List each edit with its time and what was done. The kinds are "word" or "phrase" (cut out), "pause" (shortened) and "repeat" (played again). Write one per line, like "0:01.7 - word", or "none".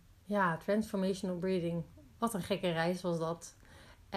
none